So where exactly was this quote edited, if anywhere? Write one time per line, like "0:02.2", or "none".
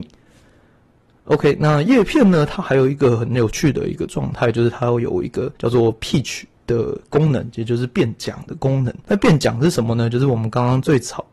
0:05.6
0:09.0